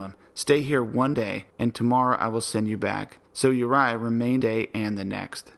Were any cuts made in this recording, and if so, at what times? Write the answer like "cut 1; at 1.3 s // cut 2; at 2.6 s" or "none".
cut 1; at 1.1 s // cut 2; at 1.5 s // cut 3; at 3.3 s // cut 4; at 4.4 s